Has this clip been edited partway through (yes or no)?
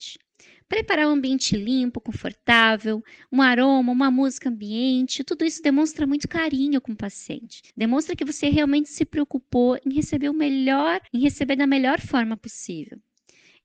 yes